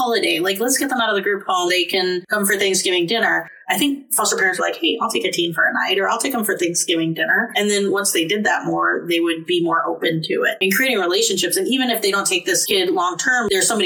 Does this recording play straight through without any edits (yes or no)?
no